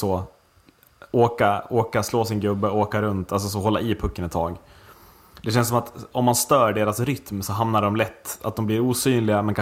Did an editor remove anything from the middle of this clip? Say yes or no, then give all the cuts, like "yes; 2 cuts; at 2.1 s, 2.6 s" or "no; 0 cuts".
no; 0 cuts